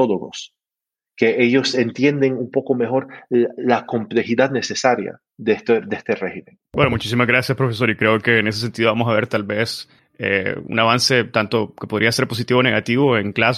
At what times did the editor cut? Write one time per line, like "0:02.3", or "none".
0:10.0